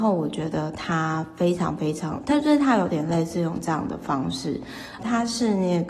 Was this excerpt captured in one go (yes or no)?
no